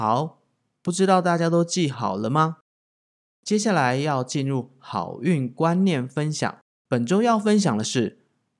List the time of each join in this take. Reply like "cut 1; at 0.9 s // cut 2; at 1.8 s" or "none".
cut 1; at 6.7 s